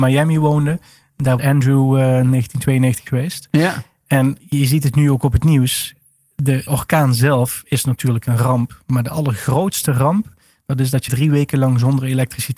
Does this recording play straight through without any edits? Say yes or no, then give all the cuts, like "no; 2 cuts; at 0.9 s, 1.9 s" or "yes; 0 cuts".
no; 5 cuts; at 1.4 s, 3.1 s, 4.4 s, 6.7 s, 11.1 s